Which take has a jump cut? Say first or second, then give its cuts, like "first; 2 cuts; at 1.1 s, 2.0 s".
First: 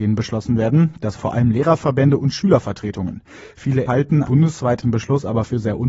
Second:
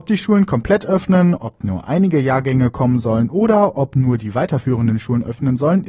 first; 4 cuts; at 1.2 s, 3.9 s, 4.2 s, 4.8 s